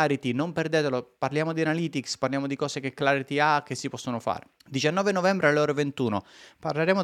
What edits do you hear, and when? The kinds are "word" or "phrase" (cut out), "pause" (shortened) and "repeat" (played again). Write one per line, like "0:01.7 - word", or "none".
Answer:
0:04.6 - pause